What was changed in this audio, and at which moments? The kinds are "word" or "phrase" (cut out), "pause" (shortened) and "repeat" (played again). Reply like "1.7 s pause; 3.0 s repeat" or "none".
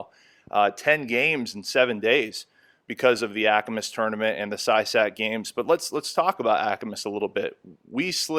none